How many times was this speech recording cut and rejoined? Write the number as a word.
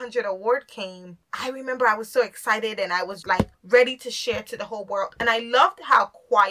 three